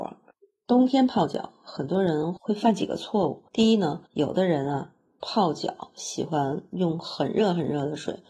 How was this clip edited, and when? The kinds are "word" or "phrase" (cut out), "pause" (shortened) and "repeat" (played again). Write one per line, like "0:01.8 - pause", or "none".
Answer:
0:03.5 - pause
0:04.1 - pause